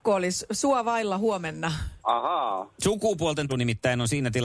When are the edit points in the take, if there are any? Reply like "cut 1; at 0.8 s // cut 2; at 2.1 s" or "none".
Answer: cut 1; at 2.0 s // cut 2; at 3.5 s